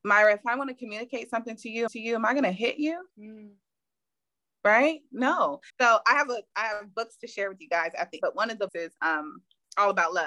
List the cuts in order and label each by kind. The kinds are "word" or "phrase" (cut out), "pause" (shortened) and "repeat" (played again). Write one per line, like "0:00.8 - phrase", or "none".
0:01.9 - repeat
0:03.1 - pause
0:05.7 - pause
0:08.2 - word
0:08.7 - word